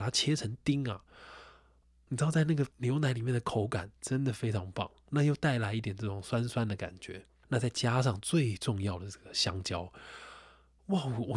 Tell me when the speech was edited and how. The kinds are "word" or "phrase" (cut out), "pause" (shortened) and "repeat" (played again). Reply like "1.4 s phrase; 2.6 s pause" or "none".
2.1 s word; 2.7 s pause; 4.0 s pause